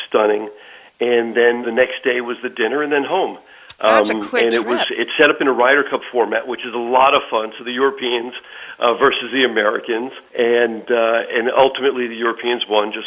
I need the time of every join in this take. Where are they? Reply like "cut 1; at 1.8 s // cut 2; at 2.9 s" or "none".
cut 1; at 1.6 s // cut 2; at 10.3 s